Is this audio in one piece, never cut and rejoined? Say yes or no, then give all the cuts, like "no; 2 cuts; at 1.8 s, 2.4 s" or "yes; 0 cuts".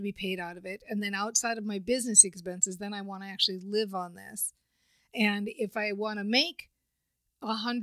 yes; 0 cuts